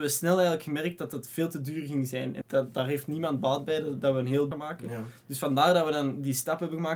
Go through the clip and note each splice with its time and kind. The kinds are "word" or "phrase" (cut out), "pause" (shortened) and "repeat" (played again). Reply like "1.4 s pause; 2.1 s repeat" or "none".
2.4 s word; 4.5 s phrase